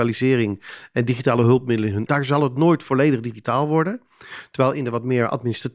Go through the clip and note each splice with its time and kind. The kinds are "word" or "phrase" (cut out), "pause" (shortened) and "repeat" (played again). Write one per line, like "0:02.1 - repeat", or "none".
0:02.1 - phrase

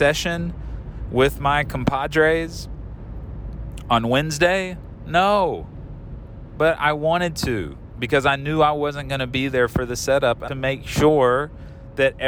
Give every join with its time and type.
0:10.5 - phrase

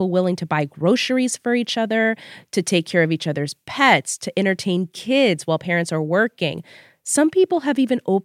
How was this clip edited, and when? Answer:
none

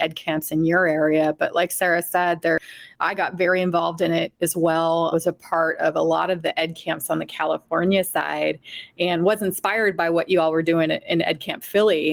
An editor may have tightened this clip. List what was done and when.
0:05.1 - word

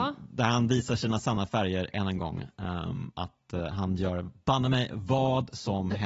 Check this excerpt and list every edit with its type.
none

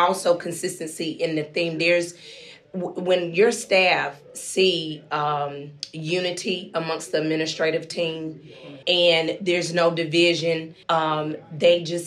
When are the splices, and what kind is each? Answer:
0:08.8 - pause
0:10.8 - pause

